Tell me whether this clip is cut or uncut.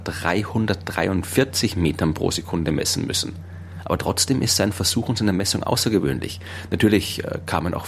uncut